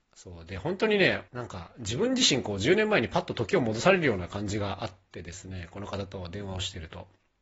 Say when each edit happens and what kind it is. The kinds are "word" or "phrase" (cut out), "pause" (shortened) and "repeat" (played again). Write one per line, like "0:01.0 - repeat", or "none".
0:01.3 - pause